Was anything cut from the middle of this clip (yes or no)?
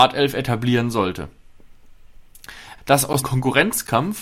yes